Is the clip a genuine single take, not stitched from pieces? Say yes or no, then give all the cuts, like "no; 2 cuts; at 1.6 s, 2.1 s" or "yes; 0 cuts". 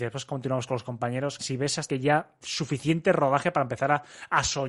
no; 3 cuts; at 1.4 s, 1.9 s, 2.4 s